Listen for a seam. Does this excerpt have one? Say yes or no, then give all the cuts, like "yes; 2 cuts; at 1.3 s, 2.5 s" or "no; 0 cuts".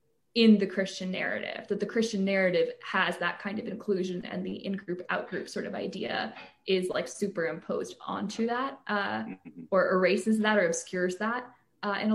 no; 0 cuts